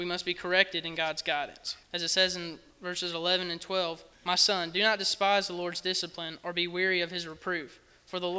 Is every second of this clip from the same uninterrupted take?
no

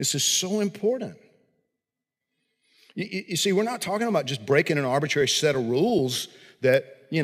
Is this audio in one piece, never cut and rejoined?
yes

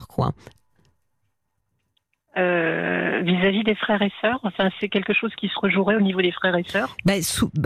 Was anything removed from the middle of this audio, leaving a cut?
no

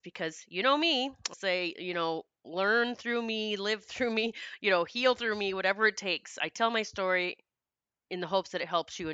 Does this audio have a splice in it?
yes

